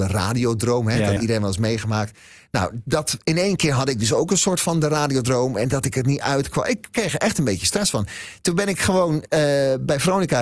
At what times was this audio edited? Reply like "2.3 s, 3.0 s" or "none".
1.2 s